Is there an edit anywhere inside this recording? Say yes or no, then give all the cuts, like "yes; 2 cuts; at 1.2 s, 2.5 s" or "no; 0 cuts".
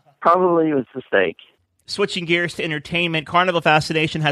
no; 0 cuts